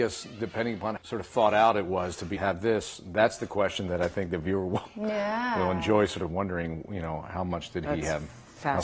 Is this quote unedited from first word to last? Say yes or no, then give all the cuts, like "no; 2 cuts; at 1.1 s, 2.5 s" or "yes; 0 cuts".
no; 2 cuts; at 1.0 s, 2.4 s